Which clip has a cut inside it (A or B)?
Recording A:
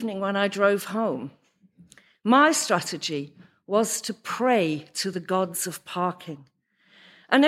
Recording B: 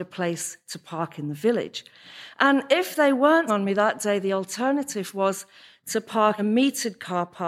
B